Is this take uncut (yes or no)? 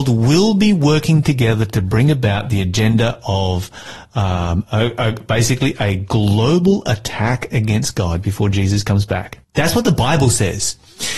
no